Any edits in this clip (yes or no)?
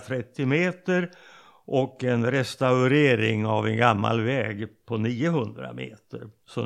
no